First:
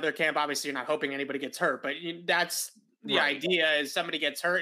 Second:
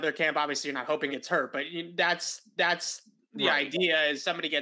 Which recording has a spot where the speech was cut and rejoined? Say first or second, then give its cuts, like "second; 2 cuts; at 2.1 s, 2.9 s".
second; 2 cuts; at 1.1 s, 2.6 s